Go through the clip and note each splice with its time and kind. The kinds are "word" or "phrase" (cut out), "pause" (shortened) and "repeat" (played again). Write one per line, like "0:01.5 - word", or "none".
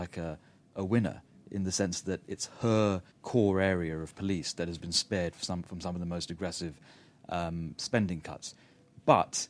0:03.1 - pause